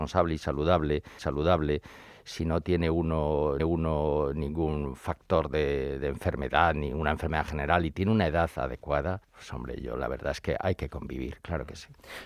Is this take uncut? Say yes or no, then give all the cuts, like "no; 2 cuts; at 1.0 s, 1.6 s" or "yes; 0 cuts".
no; 3 cuts; at 1.2 s, 3.6 s, 9.2 s